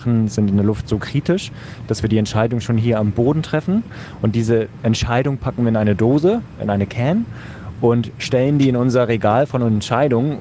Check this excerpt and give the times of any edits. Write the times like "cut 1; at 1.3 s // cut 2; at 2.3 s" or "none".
none